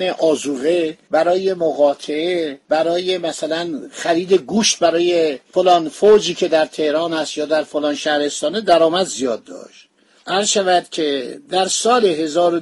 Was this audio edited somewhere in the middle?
no; 0 cuts

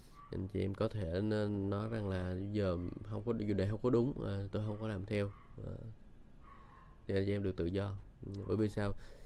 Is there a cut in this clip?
no; 0 cuts

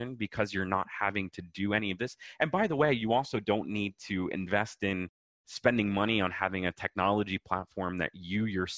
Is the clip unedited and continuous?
yes; 0 cuts

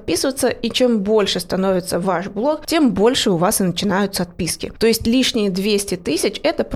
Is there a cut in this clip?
no; 0 cuts

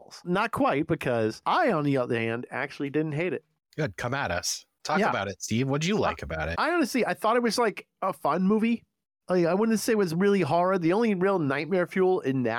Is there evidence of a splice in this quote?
no; 0 cuts

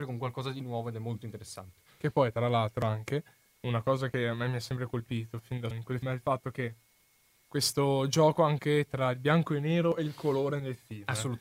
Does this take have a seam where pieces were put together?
yes; 2 cuts; at 5.7 s, 6.0 s

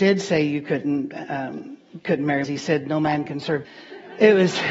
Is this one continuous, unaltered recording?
no; 2 cuts; at 2.4 s, 3.6 s

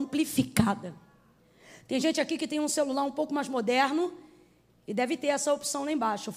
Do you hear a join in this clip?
no; 0 cuts

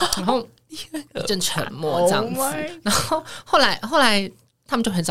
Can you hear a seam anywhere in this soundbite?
yes; 1 cut; at 1.1 s

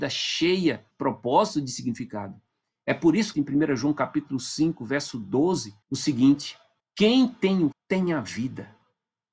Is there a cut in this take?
yes; 5 cuts; at 0.9 s, 3.3 s, 5.8 s, 6.8 s, 7.7 s

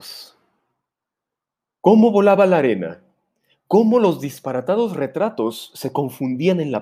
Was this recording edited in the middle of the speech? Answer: no; 0 cuts

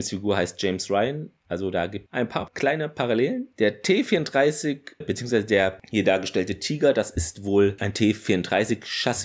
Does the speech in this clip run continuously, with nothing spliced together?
no; 2 cuts; at 2.1 s, 5.0 s

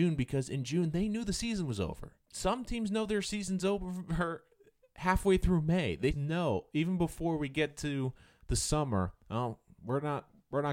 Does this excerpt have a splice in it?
yes; 2 cuts; at 2.2 s, 6.1 s

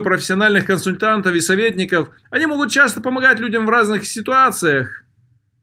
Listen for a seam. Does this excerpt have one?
yes; 1 cut; at 2.2 s

